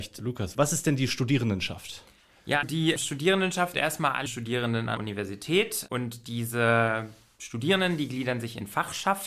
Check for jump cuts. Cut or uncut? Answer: cut